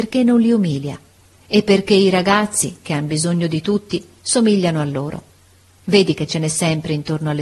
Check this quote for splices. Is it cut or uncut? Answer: uncut